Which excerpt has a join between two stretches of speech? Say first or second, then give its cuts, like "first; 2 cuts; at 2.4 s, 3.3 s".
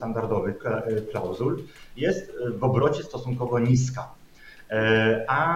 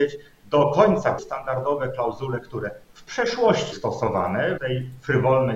second; 4 cuts; at 1.2 s, 2.8 s, 3.7 s, 4.6 s